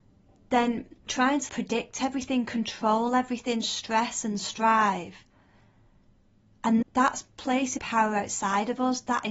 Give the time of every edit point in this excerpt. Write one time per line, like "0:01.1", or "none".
0:01.1
0:01.5
0:06.8
0:07.8